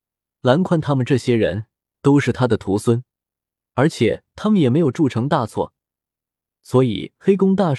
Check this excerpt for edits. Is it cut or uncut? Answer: uncut